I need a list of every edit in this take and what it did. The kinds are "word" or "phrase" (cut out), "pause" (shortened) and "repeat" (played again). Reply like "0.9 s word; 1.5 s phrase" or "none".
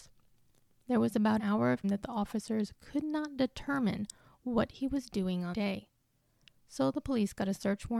1.4 s word; 1.8 s word; 5.5 s word